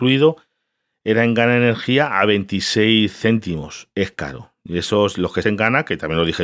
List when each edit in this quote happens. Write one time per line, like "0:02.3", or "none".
0:05.4